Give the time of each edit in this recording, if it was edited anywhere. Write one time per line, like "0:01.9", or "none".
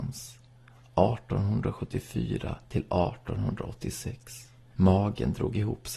0:02.6
0:04.6